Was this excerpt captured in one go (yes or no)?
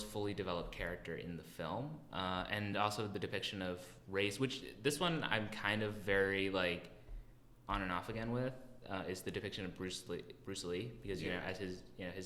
yes